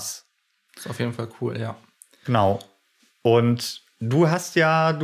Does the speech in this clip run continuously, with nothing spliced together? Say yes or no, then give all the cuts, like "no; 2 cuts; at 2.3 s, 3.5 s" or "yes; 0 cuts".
yes; 0 cuts